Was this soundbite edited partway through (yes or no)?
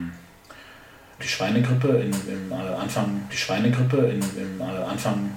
yes